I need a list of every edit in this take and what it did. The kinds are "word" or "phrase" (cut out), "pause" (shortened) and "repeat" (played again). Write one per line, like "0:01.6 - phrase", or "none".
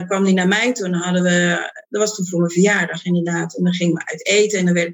0:01.8 - pause

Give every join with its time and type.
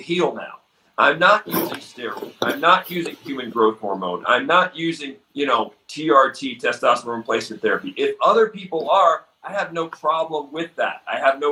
0:05.2 - pause

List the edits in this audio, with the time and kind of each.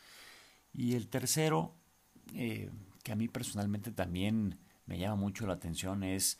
none

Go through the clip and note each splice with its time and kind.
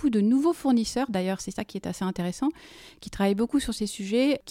none

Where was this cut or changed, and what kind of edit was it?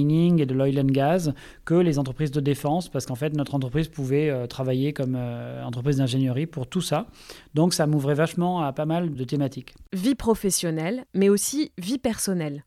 0:11.1 - pause

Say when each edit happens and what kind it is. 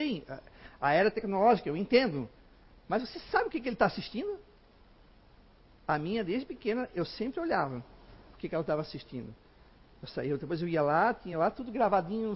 none

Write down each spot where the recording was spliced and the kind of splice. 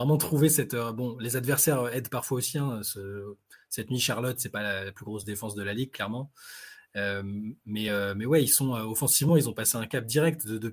none

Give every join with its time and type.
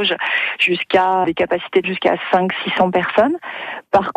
0:01.2 - word
0:01.8 - word

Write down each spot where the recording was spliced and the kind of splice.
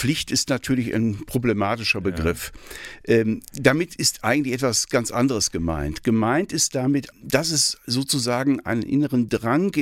0:07.1 - word

